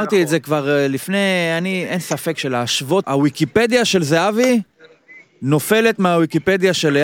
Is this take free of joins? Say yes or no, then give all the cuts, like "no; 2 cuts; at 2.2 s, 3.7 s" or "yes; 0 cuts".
no; 1 cut; at 3.0 s